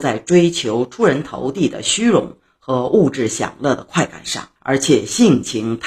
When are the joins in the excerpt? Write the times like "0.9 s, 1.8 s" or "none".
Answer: 4.6 s